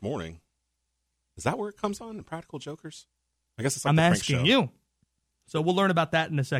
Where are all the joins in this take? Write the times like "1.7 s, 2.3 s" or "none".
none